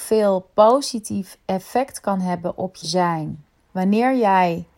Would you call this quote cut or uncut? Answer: cut